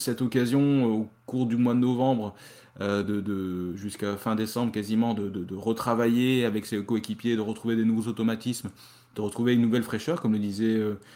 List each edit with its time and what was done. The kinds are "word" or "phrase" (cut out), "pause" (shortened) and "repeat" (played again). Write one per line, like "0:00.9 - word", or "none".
none